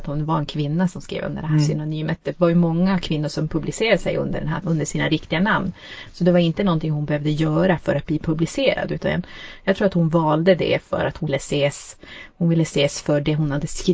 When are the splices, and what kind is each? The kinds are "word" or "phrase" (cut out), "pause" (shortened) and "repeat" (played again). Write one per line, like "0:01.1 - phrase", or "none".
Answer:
0:04.6 - word
0:11.3 - word